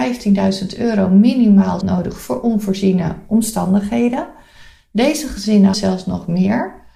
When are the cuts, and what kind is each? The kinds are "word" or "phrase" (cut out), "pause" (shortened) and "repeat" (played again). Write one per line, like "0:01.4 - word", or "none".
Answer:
0:01.8 - word
0:05.7 - word